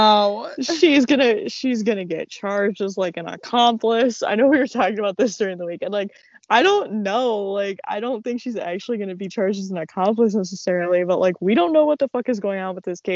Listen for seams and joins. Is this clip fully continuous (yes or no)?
yes